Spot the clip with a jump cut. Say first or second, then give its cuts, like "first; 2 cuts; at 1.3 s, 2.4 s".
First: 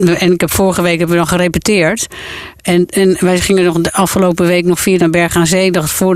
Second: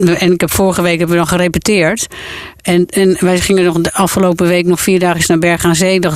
first; 1 cut; at 5.0 s